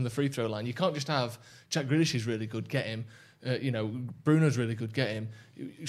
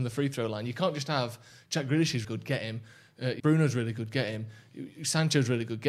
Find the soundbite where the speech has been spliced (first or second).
second